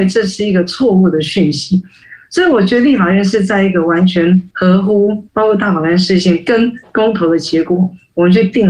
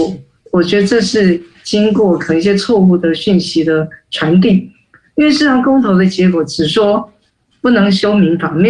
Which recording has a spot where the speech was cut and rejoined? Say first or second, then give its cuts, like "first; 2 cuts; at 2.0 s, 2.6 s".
first; 2 cuts; at 4.5 s, 5.3 s